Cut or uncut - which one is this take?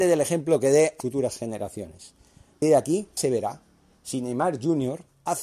cut